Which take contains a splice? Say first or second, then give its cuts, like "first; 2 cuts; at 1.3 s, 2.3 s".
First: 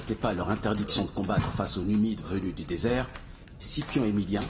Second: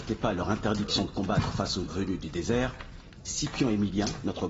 second; 1 cut; at 1.8 s